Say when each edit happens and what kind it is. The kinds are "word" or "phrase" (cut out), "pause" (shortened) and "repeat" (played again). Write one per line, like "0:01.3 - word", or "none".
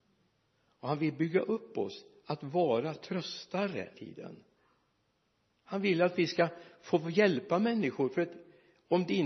0:03.9 - phrase